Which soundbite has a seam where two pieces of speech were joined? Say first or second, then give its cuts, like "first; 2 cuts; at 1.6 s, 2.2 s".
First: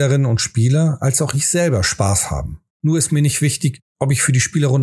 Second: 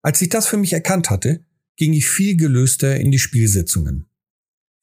first; 2 cuts; at 2.7 s, 3.9 s